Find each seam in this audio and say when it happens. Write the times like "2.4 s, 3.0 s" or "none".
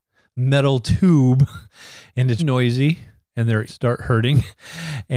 2.4 s, 3.7 s